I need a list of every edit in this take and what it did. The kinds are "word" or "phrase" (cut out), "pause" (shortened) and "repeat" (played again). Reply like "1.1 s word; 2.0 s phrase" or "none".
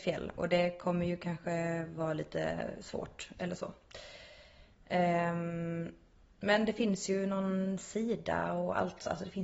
none

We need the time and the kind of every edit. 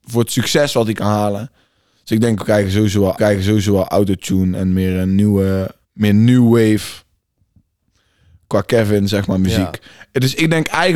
3.2 s repeat; 5.8 s pause

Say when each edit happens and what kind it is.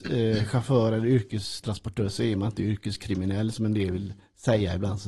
none

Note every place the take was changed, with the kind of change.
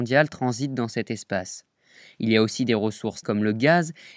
3.2 s word

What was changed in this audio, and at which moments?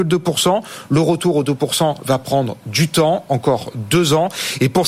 none

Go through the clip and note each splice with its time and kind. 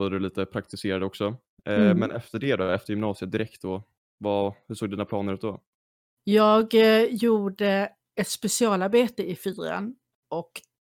none

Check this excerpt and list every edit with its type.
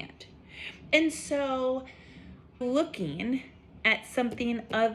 2.6 s word

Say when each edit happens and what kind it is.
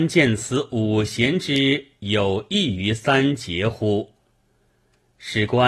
none

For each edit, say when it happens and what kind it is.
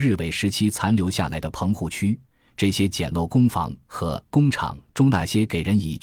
none

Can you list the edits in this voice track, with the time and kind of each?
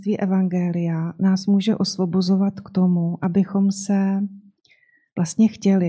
none

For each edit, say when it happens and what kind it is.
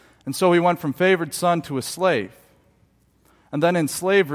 none

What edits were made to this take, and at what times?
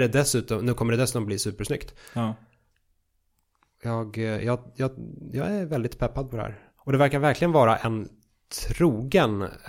none

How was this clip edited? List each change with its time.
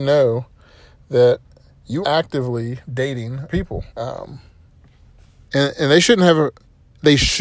2.0 s word; 3.5 s word; 3.9 s pause

